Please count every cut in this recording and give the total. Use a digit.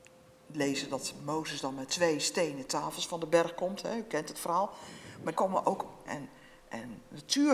3